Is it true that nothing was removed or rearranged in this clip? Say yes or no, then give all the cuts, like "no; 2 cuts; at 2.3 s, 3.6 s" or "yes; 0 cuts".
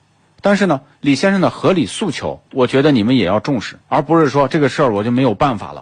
no; 2 cuts; at 2.5 s, 3.8 s